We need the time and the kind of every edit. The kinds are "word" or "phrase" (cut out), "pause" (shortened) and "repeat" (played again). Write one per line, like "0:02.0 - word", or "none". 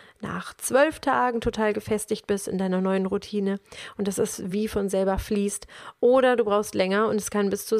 none

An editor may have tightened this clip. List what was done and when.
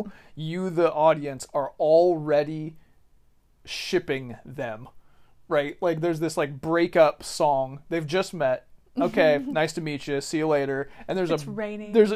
none

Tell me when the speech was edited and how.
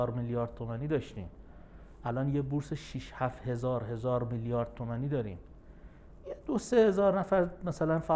none

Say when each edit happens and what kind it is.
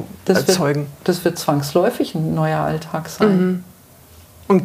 none

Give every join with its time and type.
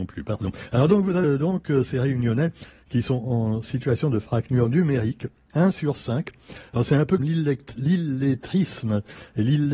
0:01.2 - word
0:07.2 - word

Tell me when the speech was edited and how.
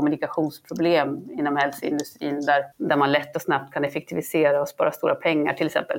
0:02.7 - pause

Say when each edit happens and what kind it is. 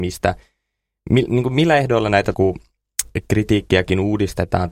0:02.3 - phrase

